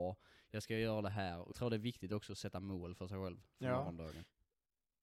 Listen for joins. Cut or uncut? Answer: cut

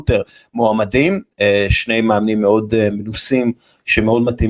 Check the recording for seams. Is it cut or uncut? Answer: uncut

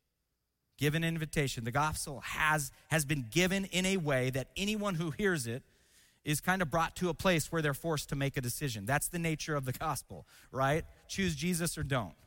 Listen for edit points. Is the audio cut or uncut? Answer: uncut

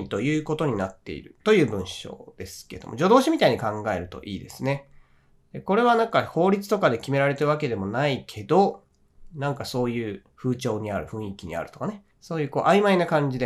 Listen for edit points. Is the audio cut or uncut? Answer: cut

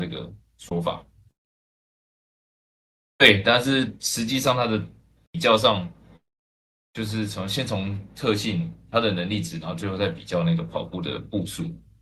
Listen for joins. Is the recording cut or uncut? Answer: uncut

